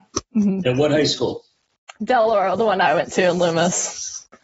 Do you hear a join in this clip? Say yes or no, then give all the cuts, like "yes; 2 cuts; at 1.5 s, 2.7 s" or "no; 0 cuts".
no; 0 cuts